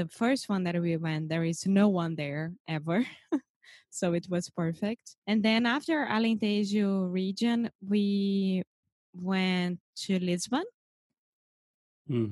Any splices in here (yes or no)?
yes